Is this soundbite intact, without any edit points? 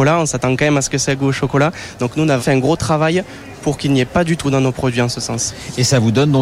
no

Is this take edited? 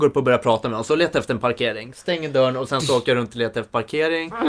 no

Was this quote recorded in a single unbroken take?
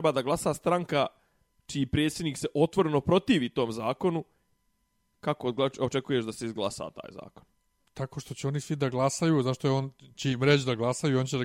yes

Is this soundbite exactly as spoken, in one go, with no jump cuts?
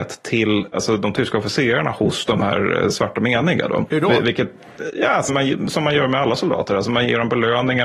no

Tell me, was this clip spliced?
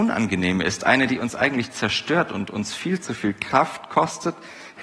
no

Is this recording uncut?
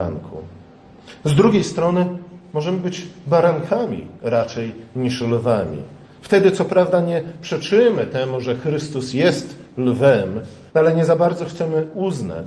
no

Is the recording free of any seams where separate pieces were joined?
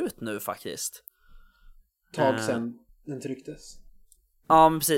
no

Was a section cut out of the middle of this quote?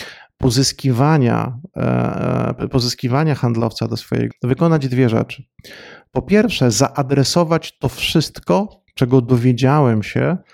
yes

